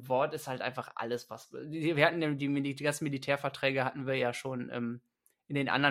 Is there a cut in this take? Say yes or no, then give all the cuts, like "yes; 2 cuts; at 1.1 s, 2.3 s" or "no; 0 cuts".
no; 0 cuts